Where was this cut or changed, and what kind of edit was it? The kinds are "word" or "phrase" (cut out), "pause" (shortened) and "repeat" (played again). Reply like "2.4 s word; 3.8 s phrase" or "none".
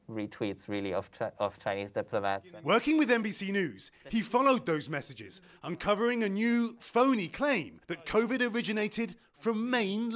7.8 s pause